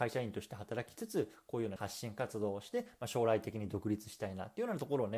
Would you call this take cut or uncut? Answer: cut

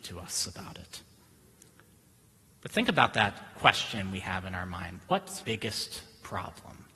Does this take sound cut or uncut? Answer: cut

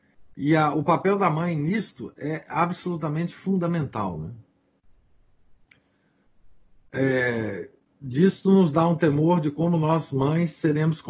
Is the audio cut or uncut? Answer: uncut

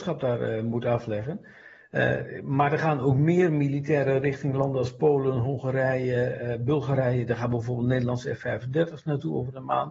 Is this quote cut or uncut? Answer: uncut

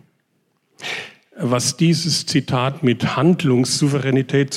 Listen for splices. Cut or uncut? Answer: uncut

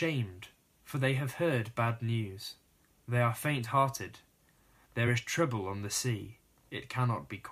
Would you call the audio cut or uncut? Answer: uncut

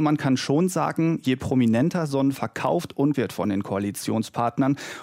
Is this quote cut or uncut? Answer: cut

